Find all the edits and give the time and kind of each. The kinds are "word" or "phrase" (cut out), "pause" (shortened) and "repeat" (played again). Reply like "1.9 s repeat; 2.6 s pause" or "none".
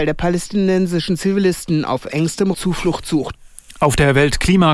2.5 s word

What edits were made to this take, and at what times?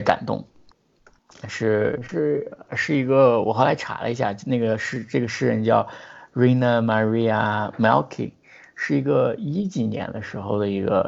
none

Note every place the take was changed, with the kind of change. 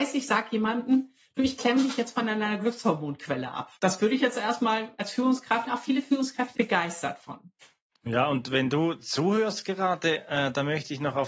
3.8 s pause; 5.7 s phrase; 6.6 s word

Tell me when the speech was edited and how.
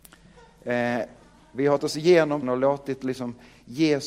1.8 s word; 2.4 s word

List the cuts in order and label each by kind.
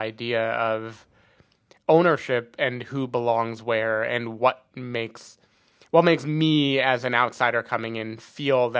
none

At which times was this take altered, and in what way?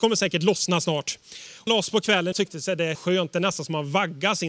1.7 s word; 2.3 s word; 2.9 s word

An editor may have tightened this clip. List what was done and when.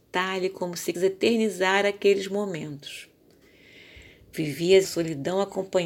0.9 s word; 4.8 s word

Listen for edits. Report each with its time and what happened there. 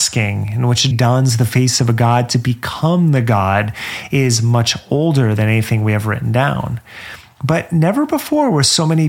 0.9 s word

